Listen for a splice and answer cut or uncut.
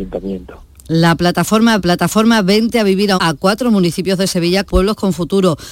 cut